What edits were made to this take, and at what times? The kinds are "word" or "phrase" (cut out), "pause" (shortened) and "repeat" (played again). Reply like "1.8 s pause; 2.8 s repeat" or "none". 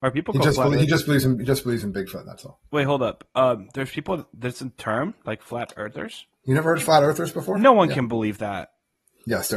2.7 s pause; 6.3 s pause